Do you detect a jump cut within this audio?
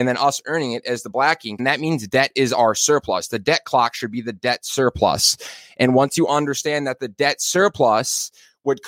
yes; 1 cut; at 1.6 s

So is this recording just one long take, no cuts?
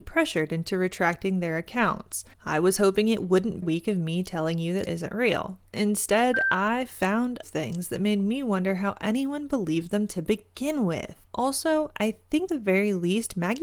no; 7 cuts; at 2.3 s, 3.6 s, 4.9 s, 5.7 s, 7.4 s, 11.2 s, 12.5 s

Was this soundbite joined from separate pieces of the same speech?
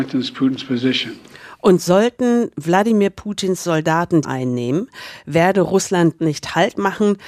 yes; 2 cuts; at 4.2 s, 6.2 s

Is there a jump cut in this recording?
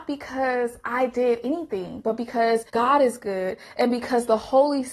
yes; 1 cut; at 2.7 s

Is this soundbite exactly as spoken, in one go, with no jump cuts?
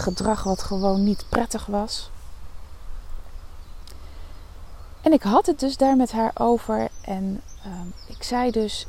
yes; 0 cuts

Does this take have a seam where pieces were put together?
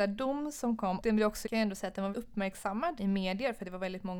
yes; 4 cuts; at 1.0 s, 1.5 s, 2.1 s, 3.0 s

